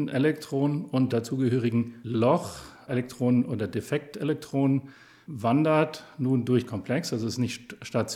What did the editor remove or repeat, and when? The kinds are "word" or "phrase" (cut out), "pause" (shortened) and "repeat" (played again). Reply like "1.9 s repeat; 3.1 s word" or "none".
1.1 s word; 2.9 s word; 6.7 s word

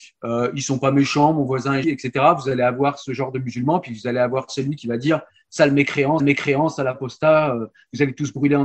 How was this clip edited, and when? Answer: 1.8 s word; 6.2 s repeat

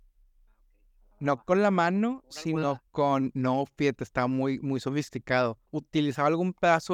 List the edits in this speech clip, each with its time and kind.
2.9 s pause; 5.7 s pause

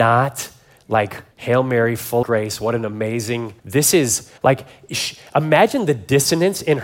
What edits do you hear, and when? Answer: 1.3 s pause; 2.2 s word; 3.6 s pause; 4.4 s pause

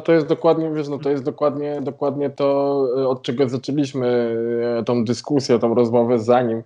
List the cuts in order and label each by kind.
none

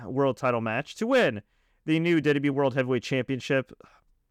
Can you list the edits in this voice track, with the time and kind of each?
none

